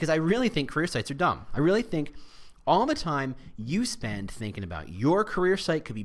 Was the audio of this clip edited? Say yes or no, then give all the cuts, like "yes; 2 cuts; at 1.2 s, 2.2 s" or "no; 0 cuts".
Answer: no; 0 cuts